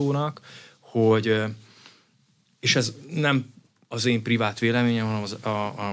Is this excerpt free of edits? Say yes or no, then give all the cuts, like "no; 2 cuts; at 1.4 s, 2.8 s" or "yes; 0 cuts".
yes; 0 cuts